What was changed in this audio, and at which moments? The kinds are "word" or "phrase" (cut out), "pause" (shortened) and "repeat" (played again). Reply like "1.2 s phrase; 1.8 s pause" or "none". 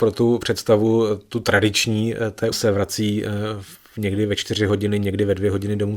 2.5 s phrase